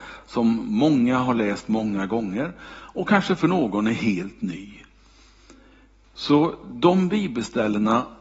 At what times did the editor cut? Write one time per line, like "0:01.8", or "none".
none

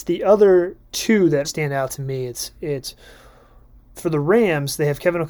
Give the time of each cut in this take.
0:01.4
0:03.9

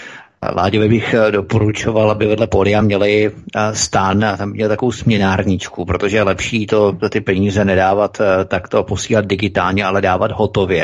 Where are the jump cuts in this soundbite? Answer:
none

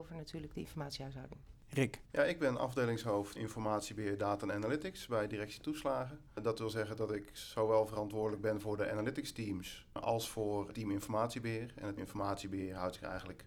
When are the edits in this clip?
0:02.0
0:03.4
0:12.0

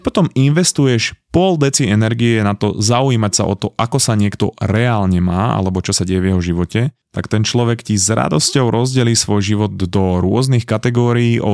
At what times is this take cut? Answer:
none

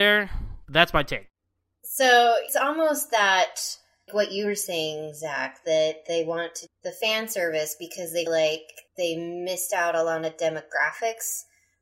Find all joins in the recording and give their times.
0:02.5
0:04.1
0:06.7
0:08.3
0:08.9

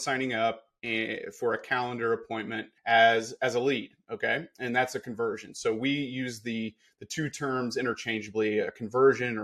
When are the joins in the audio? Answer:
0:02.8

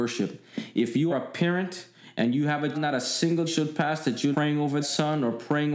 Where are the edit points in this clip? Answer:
0:01.1
0:02.7
0:03.5
0:04.3
0:04.8

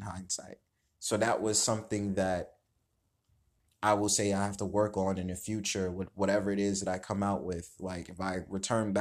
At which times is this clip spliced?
none

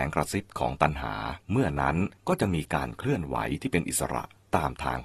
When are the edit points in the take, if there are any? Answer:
0:01.4
0:02.2

